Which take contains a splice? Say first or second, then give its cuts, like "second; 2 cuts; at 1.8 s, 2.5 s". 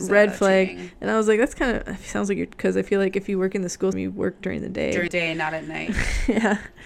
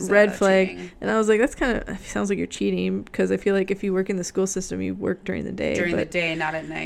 first; 3 cuts; at 2.5 s, 3.9 s, 5.1 s